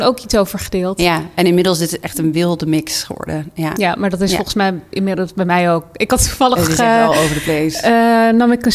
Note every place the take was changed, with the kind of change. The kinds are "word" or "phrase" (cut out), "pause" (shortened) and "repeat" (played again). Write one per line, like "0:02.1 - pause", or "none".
none